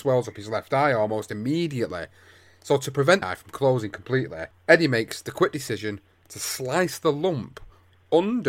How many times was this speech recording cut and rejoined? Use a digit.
1